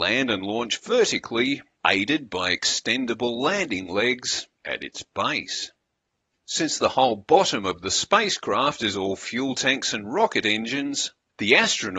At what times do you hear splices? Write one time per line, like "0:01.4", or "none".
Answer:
none